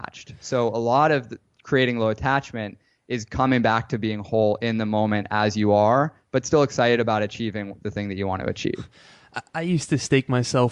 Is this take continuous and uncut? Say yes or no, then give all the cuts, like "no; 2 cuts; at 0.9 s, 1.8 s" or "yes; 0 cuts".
yes; 0 cuts